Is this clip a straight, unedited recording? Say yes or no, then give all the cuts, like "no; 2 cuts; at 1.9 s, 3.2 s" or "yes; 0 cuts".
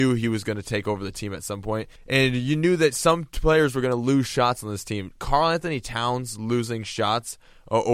no; 1 cut; at 2.0 s